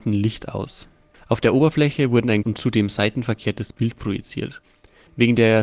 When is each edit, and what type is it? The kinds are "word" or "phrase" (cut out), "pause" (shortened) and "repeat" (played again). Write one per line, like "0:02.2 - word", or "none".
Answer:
0:02.4 - word

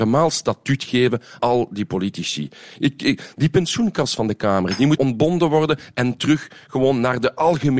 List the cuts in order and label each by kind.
0:01.4 - word
0:05.0 - word

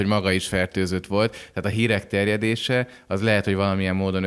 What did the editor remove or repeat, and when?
none

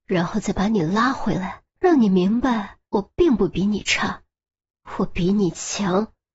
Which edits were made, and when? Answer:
0:01.7 - pause
0:02.9 - pause

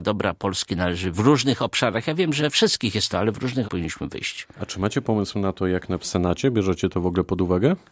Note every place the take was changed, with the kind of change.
0:01.1 - phrase
0:02.4 - word
0:03.1 - word
0:03.6 - word
0:04.5 - pause
0:06.0 - phrase

